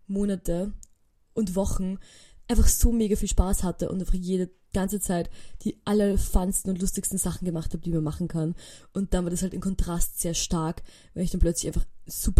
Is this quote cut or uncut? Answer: uncut